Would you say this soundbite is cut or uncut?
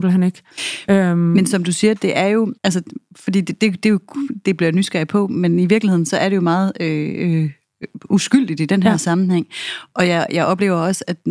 cut